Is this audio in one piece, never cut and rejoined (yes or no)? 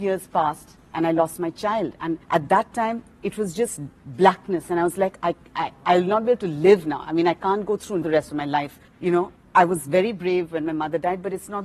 no